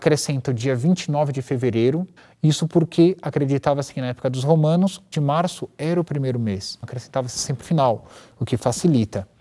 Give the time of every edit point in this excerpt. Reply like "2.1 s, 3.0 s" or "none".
2.2 s, 5.1 s, 6.8 s, 7.6 s